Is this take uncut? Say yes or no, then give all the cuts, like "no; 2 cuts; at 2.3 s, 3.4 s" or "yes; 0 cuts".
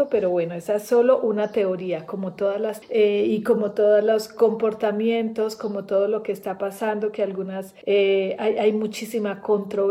no; 2 cuts; at 2.8 s, 7.8 s